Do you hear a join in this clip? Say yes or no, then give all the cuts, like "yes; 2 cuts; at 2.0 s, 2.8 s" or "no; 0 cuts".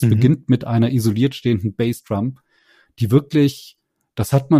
no; 0 cuts